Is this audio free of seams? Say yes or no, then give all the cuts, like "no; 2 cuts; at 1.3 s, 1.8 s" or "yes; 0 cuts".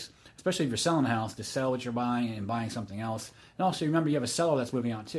yes; 0 cuts